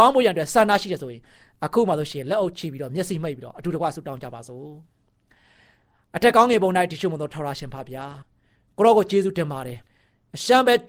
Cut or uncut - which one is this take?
cut